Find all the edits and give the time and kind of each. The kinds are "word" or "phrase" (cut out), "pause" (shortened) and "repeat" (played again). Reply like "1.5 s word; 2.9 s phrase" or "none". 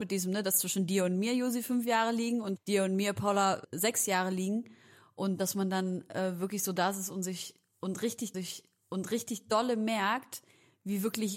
2.6 s word; 8.3 s repeat